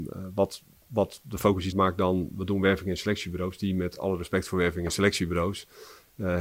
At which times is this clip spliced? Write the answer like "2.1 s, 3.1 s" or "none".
1.7 s